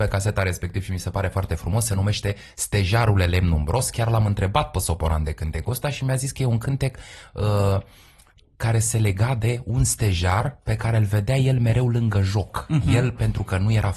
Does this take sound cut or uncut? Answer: uncut